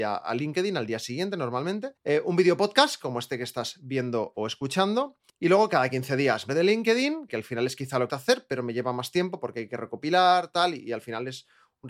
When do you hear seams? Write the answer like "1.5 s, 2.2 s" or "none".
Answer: 2.0 s, 6.5 s, 7.3 s, 8.1 s